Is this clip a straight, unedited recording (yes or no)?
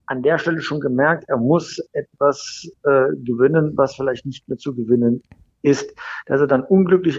yes